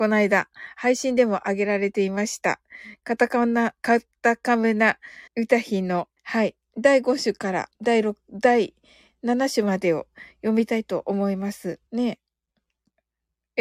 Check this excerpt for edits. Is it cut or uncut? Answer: cut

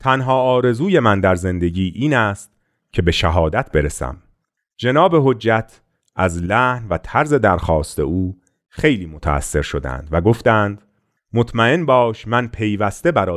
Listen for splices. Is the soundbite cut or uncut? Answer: uncut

